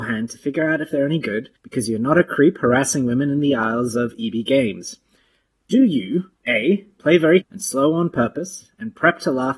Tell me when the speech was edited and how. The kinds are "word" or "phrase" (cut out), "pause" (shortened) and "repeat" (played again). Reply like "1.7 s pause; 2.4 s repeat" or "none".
1.6 s pause; 6.4 s pause; 7.4 s word

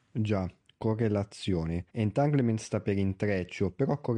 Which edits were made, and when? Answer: 1.9 s pause

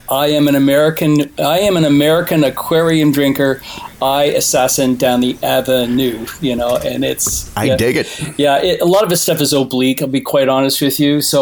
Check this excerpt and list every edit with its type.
none

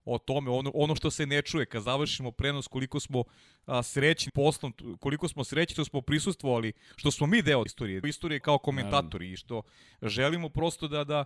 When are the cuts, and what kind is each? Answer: 4.3 s word; 7.7 s word; 8.0 s word; 8.4 s word

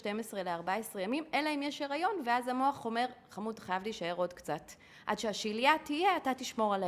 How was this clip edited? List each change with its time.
none

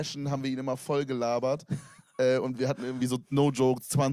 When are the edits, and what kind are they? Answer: none

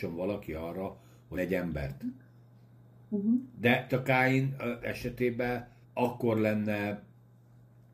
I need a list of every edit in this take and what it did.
1.3 s word; 3.9 s word; 4.8 s word; 5.8 s pause

